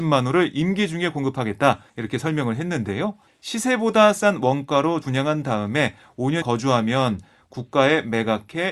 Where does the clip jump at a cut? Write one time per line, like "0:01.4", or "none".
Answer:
0:01.9
0:03.3
0:05.0
0:06.4